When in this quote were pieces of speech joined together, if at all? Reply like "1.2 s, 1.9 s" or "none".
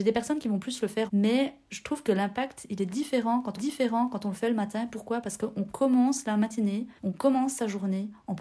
1.1 s, 3.6 s, 7.0 s